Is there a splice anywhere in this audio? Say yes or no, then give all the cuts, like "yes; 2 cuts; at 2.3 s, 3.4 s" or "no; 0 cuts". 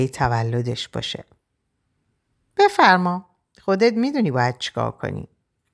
no; 0 cuts